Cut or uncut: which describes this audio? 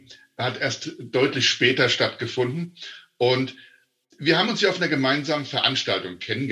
uncut